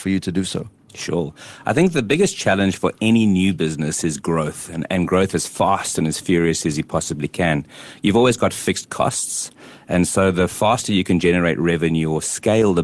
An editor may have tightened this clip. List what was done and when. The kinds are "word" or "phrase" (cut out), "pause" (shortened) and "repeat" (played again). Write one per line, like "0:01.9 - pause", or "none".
none